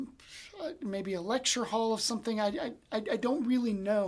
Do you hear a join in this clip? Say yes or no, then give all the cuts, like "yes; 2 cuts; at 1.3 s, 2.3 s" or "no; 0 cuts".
no; 0 cuts